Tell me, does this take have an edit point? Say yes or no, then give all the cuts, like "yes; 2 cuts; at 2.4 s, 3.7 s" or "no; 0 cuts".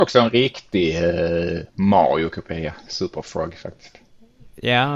no; 0 cuts